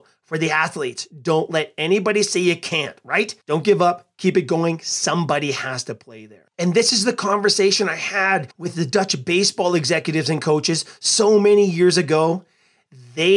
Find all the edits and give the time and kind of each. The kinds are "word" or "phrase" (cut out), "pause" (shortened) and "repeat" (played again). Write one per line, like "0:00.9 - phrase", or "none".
0:03.4 - pause
0:06.5 - pause
0:08.5 - pause